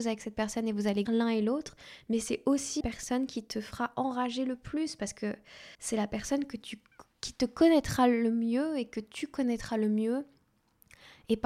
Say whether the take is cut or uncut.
cut